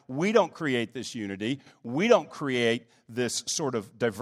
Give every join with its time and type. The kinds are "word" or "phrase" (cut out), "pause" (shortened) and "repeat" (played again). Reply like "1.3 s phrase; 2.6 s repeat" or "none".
none